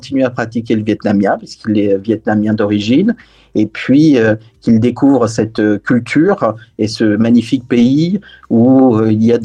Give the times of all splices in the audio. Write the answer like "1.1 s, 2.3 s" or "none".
none